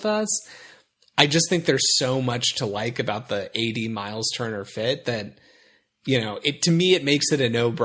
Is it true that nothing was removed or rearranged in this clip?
yes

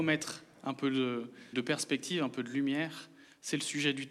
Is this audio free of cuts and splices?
no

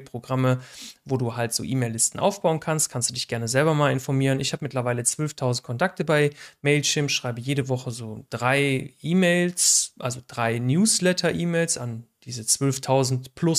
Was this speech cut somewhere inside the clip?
no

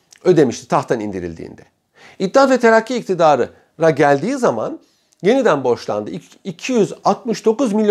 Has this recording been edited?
no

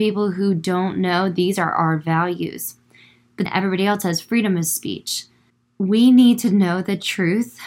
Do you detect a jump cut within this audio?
yes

